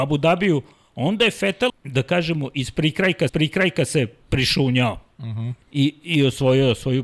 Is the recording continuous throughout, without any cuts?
no; 3 cuts; at 1.7 s, 3.3 s, 5.6 s

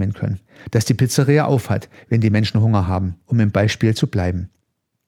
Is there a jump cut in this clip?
no; 0 cuts

